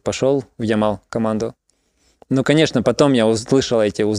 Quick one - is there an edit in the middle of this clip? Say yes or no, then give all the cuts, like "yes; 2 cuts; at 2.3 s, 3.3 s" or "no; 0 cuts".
no; 0 cuts